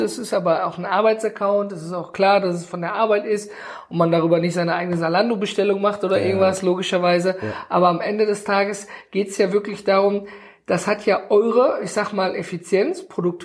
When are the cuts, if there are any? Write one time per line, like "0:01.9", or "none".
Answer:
none